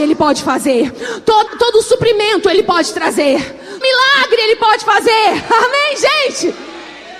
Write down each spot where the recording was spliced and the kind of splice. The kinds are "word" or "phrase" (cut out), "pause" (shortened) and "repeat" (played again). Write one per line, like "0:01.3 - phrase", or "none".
0:01.5 - word
0:03.8 - word